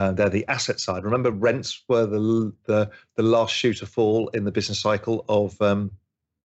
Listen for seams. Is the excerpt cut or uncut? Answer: uncut